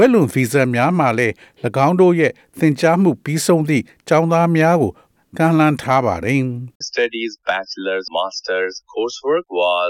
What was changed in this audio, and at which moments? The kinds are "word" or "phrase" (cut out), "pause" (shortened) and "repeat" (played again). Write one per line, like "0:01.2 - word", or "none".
0:06.8 - word
0:08.1 - word
0:08.9 - word